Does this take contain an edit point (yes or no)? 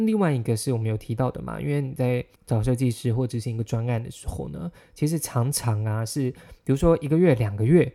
yes